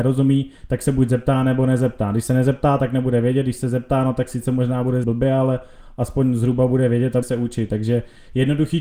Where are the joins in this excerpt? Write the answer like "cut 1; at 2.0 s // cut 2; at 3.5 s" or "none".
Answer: cut 1; at 5.0 s // cut 2; at 7.2 s